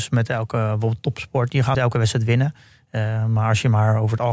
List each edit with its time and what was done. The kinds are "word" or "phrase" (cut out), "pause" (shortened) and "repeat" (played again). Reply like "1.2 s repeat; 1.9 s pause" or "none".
1.7 s word